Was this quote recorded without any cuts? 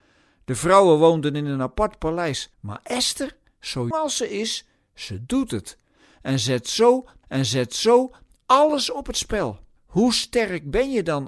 no; 4 cuts; at 2.5 s, 3.9 s, 7.2 s, 9.8 s

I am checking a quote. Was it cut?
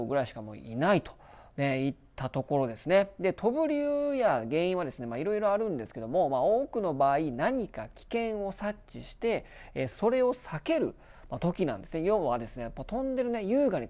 no; 0 cuts

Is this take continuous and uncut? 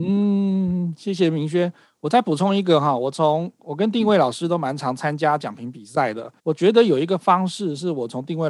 no; 1 cut; at 6.4 s

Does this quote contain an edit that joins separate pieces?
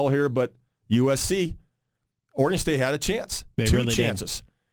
no; 0 cuts

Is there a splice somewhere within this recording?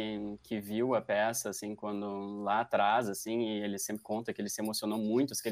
no; 0 cuts

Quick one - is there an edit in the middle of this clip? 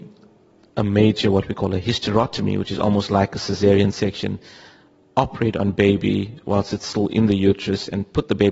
no; 0 cuts

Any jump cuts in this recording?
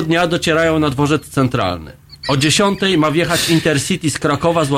no; 0 cuts

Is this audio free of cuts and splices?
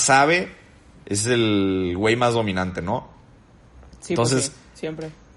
yes; 0 cuts

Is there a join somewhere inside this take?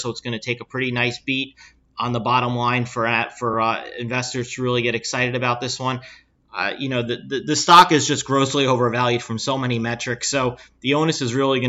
no; 0 cuts

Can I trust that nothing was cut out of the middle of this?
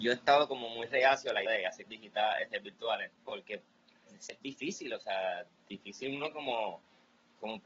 no; 4 cuts; at 1.5 s, 1.9 s, 3.2 s, 4.3 s

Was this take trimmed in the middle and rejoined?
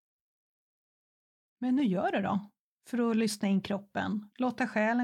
no; 0 cuts

